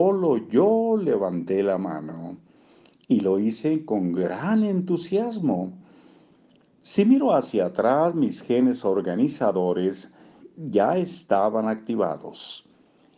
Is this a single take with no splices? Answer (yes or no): yes